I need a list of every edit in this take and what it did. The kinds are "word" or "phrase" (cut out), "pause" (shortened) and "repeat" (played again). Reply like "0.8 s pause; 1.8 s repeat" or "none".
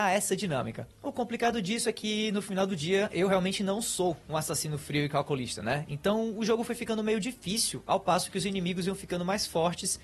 none